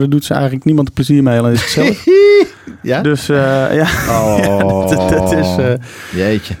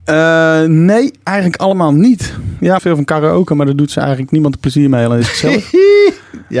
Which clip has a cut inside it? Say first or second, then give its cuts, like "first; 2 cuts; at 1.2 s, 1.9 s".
second; 1 cut; at 2.8 s